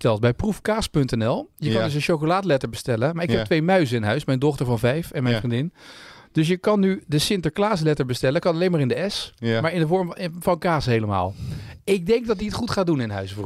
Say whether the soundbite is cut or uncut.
uncut